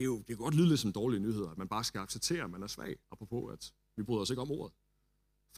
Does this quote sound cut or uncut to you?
cut